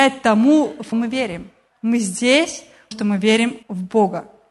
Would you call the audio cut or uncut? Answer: cut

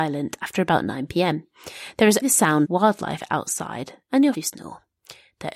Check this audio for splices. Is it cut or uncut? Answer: cut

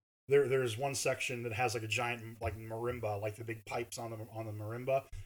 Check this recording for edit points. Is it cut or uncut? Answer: uncut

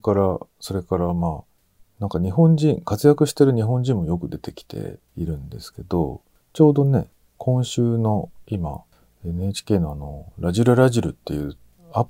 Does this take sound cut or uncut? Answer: uncut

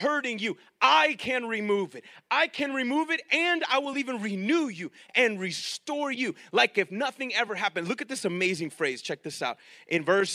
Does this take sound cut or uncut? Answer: uncut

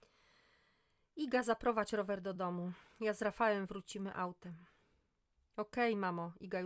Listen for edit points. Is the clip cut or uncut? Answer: uncut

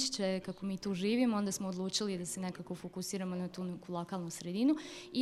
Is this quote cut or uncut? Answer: uncut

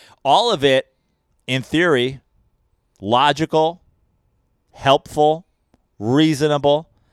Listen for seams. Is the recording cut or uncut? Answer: uncut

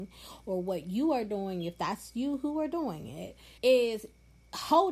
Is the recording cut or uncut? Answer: cut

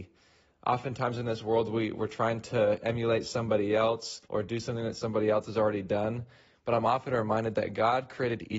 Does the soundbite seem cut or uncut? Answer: cut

